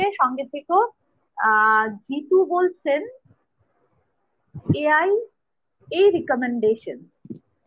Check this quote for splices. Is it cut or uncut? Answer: uncut